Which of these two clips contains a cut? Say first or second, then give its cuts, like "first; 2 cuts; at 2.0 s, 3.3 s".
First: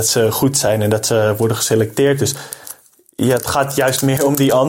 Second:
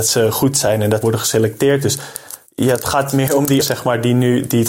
second; 4 cuts; at 1.0 s, 2.5 s, 3.1 s, 3.6 s